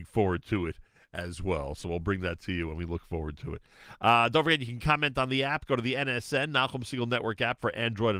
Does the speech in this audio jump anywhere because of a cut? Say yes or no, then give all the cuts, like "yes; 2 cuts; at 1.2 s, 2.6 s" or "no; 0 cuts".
no; 0 cuts